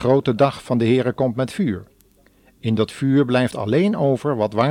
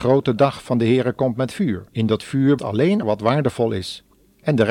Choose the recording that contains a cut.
second; 3 cuts; at 1.9 s, 2.6 s, 3.0 s

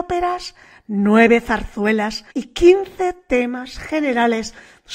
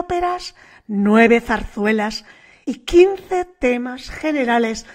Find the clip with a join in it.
first; 1 cut; at 2.3 s

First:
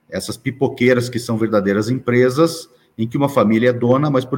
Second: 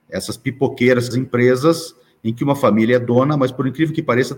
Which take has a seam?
second; 1 cut; at 1.1 s

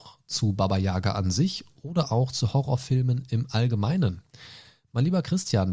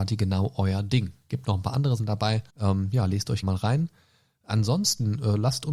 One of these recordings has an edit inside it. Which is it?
second; 3 cuts; at 2.0 s, 2.5 s, 3.4 s

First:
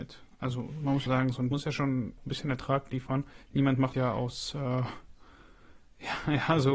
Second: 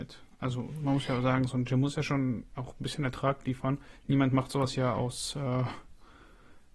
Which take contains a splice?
first; 4 cuts; at 1.1 s, 1.5 s, 2.2 s, 3.9 s

